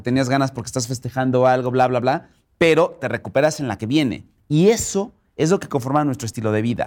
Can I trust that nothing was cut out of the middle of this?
yes; 0 cuts

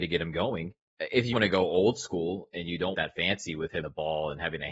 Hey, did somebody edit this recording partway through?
yes; 3 cuts; at 1.3 s, 2.9 s, 3.8 s

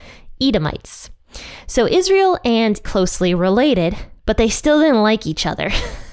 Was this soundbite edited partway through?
yes; 2 cuts; at 2.8 s, 4.2 s

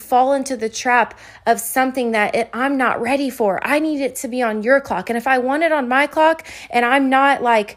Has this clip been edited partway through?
no; 0 cuts

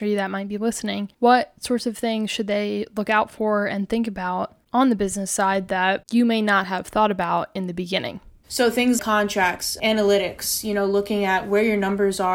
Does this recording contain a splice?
yes; 2 cuts; at 1.1 s, 9.0 s

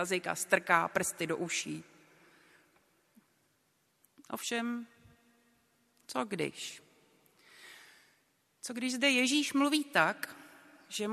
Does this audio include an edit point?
no; 0 cuts

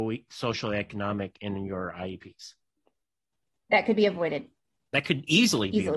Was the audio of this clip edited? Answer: no; 0 cuts

